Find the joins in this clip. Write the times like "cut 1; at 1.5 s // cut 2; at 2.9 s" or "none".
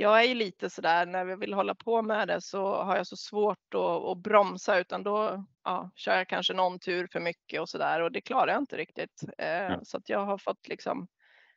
cut 1; at 5.5 s